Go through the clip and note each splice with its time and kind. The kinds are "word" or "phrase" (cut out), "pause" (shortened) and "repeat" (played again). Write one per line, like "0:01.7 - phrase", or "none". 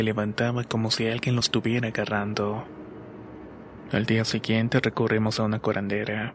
none